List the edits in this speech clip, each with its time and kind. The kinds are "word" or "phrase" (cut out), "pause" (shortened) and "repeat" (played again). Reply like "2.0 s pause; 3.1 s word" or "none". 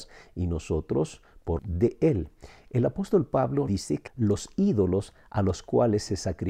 1.6 s word; 3.7 s word; 4.1 s word